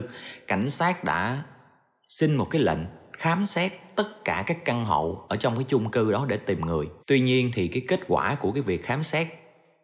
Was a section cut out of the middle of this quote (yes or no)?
yes